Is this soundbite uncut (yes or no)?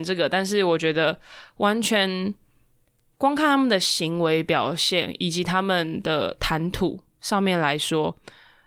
yes